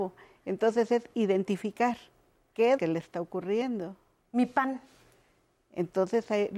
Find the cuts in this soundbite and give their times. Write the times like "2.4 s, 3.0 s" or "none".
2.8 s